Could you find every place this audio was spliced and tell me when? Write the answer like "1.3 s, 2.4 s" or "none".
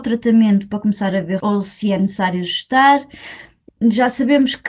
1.4 s, 3.7 s